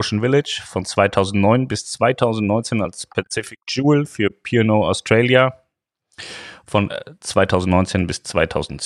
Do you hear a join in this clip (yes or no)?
no